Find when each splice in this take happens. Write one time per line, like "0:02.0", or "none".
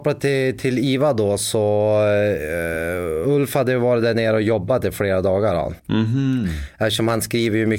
0:05.8